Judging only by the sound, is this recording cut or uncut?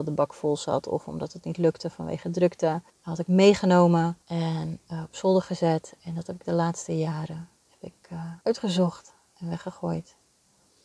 cut